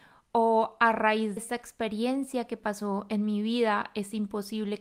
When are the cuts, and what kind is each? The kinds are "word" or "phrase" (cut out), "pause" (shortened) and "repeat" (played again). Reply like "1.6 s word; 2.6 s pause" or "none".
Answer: 1.4 s word